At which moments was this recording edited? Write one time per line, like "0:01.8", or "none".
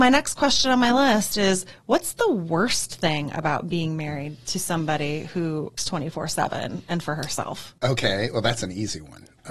0:05.8
0:07.8